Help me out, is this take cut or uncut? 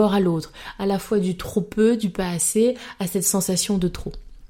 uncut